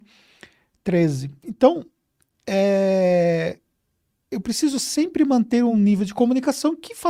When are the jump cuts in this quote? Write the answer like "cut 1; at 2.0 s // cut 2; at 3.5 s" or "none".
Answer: none